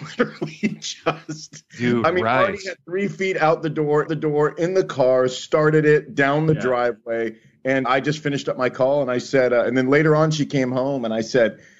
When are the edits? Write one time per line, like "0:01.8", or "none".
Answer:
0:04.1
0:07.8